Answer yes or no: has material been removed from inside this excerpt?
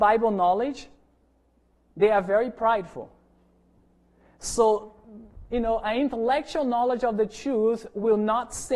no